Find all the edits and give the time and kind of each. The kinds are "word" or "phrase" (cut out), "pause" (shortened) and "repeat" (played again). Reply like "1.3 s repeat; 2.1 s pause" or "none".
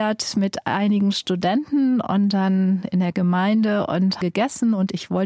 4.2 s phrase